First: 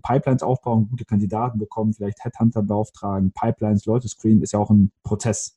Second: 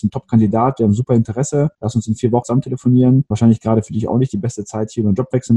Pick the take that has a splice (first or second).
second